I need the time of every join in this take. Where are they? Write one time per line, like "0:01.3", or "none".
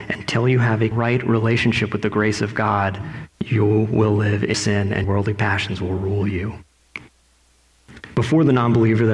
0:00.9
0:03.3
0:04.5
0:05.0